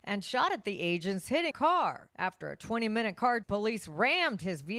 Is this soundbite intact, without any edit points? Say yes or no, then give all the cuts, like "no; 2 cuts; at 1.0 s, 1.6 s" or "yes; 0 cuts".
no; 2 cuts; at 1.5 s, 3.4 s